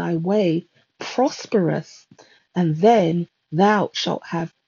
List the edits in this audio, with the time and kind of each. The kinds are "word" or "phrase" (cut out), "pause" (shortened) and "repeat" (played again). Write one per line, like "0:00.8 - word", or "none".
none